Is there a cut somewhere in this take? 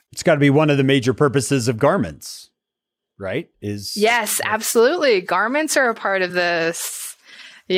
no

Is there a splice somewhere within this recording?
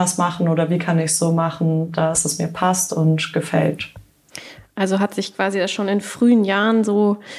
no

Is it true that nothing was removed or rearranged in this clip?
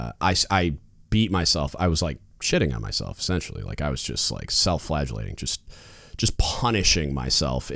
yes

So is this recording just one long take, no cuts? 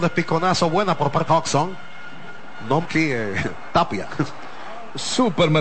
no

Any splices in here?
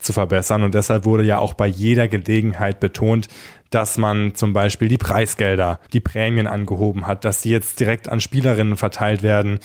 yes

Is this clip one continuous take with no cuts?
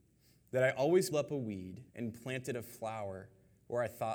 no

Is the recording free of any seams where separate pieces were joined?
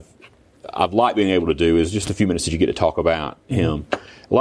yes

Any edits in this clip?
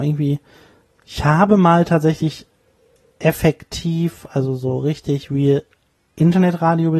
no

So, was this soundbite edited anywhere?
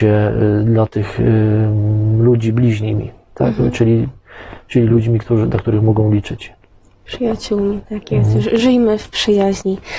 no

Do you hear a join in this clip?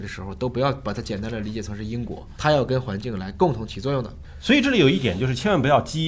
yes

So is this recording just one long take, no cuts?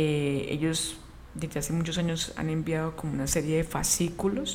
yes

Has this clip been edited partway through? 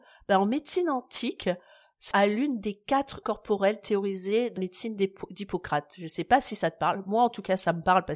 yes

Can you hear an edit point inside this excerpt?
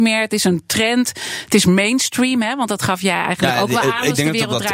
no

